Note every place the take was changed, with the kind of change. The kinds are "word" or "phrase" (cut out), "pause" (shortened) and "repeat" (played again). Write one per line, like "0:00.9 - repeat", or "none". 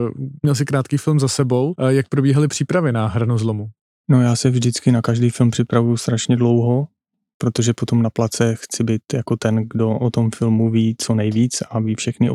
none